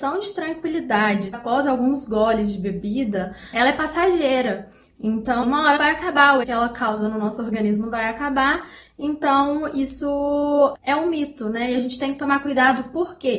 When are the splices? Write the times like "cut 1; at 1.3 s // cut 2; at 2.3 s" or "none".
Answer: cut 1; at 1.3 s // cut 2; at 3.5 s // cut 3; at 5.4 s // cut 4; at 5.8 s // cut 5; at 6.4 s // cut 6; at 10.8 s